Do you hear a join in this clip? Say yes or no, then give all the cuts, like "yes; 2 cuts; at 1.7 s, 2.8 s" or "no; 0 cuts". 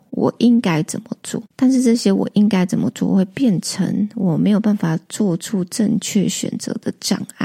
yes; 1 cut; at 1.5 s